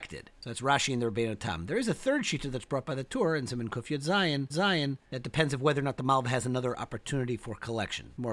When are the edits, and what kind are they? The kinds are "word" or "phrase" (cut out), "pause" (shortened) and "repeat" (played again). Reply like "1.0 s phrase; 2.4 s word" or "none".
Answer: 4.5 s repeat